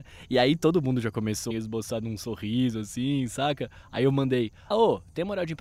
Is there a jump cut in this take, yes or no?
yes